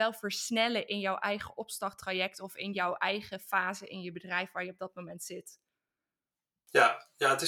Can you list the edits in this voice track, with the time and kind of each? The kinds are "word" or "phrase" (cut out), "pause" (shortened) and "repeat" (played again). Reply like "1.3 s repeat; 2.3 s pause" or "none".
none